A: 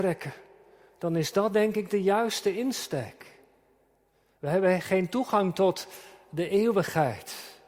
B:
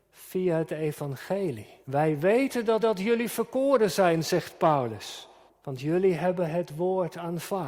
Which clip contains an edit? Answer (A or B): B